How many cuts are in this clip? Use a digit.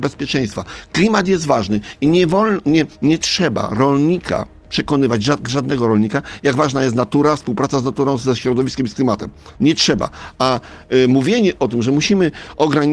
1